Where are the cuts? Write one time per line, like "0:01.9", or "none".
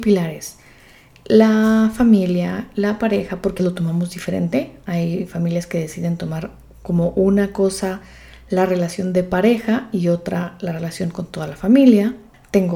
0:03.6